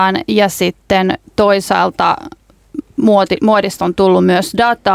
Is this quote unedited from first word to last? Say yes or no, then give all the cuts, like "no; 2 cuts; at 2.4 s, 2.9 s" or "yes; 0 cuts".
yes; 0 cuts